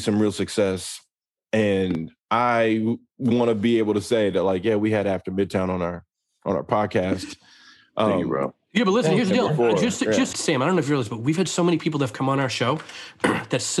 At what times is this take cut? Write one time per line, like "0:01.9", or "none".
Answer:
0:02.2
0:10.3